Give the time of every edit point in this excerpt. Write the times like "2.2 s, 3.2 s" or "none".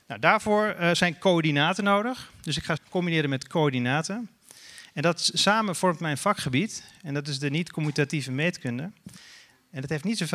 2.8 s